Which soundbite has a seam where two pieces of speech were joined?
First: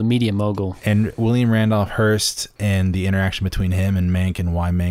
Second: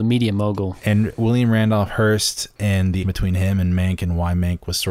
second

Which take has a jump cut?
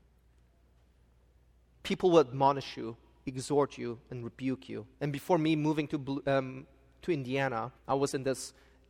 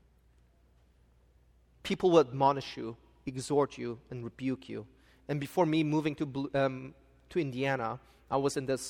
first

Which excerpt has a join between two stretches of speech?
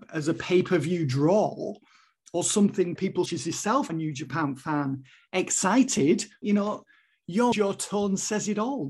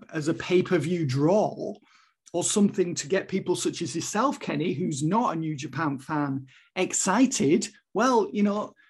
first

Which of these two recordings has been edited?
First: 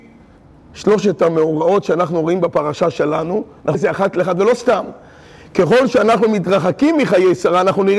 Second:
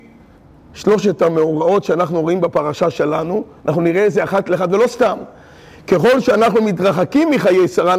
first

